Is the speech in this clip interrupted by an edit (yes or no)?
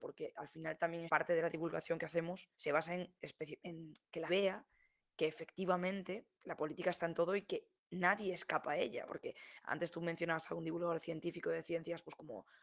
yes